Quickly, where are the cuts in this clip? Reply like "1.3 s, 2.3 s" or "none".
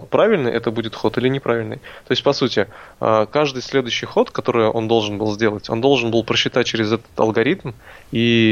none